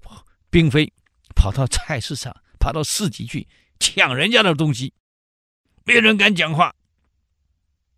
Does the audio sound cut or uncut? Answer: uncut